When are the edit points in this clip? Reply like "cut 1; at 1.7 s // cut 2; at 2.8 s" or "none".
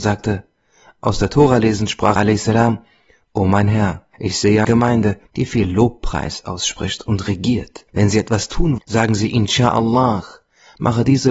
cut 1; at 2.2 s // cut 2; at 4.1 s // cut 3; at 4.6 s // cut 4; at 5.3 s // cut 5; at 7.9 s // cut 6; at 8.8 s